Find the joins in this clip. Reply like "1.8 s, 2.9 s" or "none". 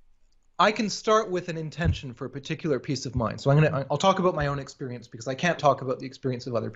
5.6 s